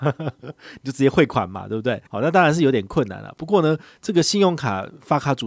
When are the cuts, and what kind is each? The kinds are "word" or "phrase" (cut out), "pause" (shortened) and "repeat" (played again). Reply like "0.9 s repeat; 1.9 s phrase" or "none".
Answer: 2.1 s pause